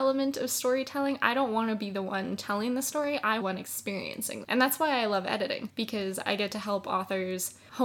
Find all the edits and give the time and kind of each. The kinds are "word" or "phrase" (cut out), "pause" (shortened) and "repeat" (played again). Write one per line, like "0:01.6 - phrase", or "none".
0:03.4 - phrase
0:04.4 - phrase